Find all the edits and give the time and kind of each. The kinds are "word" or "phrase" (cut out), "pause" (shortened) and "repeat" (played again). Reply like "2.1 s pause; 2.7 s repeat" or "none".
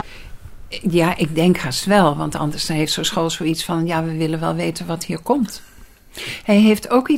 none

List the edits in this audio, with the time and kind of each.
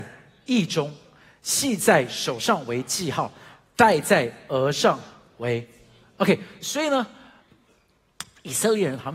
none

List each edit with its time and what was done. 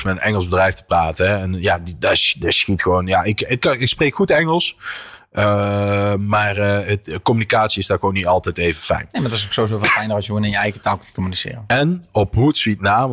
none

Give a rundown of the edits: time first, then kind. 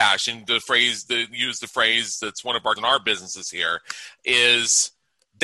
2.8 s word

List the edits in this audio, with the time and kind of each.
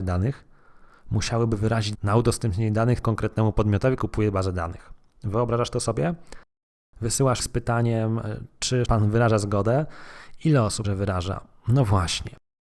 1.9 s word; 3.0 s word; 4.0 s word; 7.4 s word; 8.9 s word; 10.8 s word

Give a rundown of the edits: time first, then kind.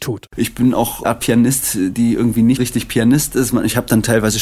1.0 s word; 2.6 s word

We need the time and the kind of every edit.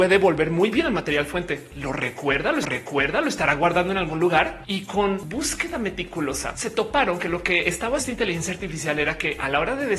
2.6 s repeat; 8.0 s word

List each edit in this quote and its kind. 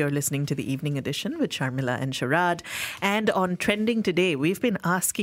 none

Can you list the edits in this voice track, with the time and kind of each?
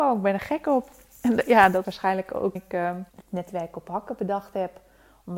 1.8 s word; 2.6 s word; 3.1 s pause

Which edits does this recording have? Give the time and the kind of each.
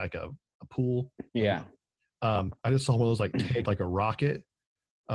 1.3 s pause; 2.6 s pause; 3.7 s word

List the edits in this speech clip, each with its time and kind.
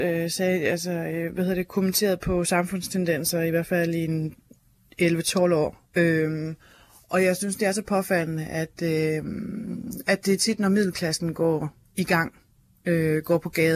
none

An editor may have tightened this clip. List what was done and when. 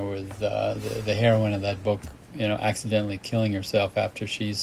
none

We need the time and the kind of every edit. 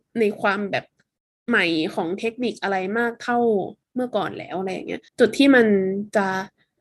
5.1 s pause

